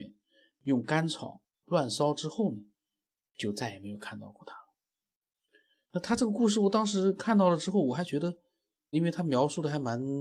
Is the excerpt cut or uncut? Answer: cut